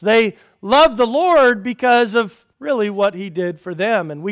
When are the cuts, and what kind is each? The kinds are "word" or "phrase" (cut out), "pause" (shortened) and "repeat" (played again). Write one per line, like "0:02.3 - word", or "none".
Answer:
0:02.5 - pause